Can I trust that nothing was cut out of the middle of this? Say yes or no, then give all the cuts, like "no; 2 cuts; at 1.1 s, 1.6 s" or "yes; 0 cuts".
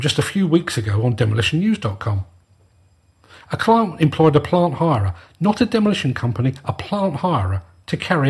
yes; 0 cuts